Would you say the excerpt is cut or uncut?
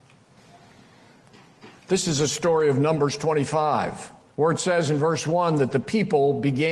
cut